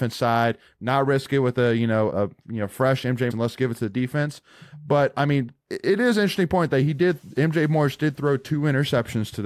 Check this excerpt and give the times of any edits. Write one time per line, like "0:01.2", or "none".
0:02.1
0:03.3
0:05.6